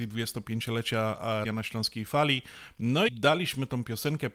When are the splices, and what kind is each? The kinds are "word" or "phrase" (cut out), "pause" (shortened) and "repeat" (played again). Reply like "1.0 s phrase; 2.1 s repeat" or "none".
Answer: 1.5 s word; 3.1 s word